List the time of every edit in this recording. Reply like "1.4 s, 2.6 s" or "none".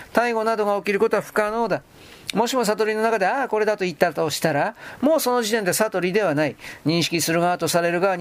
none